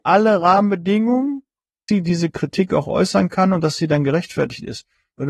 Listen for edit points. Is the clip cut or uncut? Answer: cut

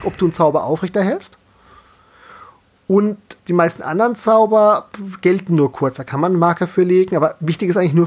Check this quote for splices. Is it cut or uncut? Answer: cut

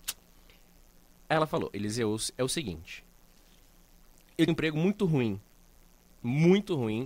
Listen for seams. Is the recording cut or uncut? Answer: cut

